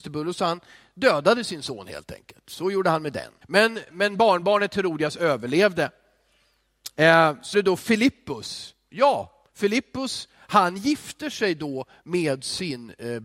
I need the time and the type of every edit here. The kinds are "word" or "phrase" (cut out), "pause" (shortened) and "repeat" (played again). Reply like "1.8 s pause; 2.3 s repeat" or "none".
3.4 s pause; 7.5 s word; 9.5 s pause